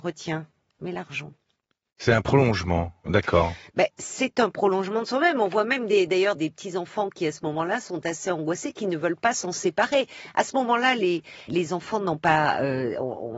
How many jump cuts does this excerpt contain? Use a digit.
2